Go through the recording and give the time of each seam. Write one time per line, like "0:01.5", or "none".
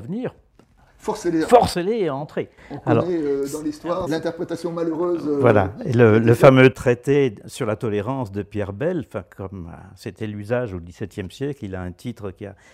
0:04.1